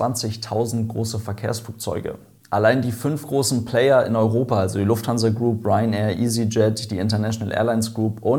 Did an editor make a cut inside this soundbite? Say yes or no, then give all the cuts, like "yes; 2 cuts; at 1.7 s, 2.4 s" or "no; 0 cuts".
no; 0 cuts